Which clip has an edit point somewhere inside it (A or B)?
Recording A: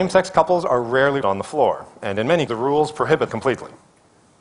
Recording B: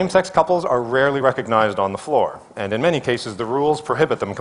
A